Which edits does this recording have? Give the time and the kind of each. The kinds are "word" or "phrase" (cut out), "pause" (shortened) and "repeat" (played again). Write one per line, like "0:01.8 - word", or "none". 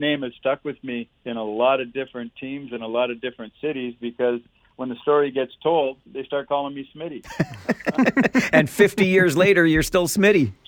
0:01.2 - pause
0:06.1 - pause